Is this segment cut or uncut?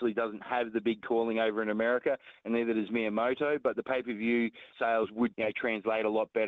cut